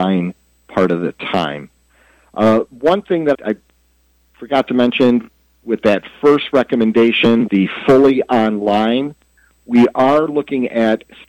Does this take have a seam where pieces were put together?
yes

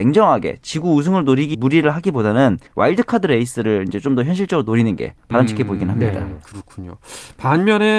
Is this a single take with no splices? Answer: no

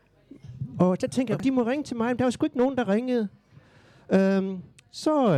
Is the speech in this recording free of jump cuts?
yes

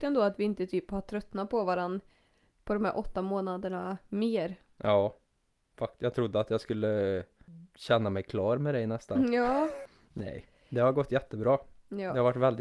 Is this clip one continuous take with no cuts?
yes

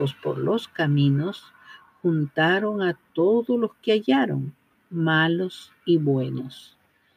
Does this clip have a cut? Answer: no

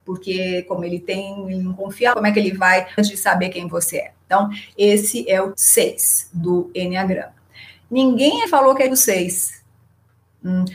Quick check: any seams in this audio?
yes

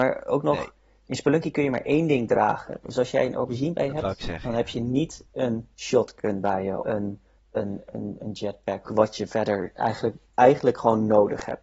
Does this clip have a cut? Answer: yes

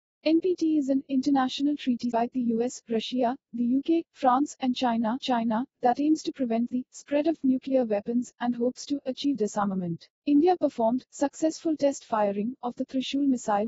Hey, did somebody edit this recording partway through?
yes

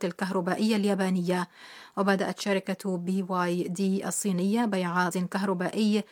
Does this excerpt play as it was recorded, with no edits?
no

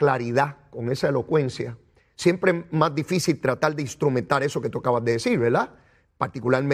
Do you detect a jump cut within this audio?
no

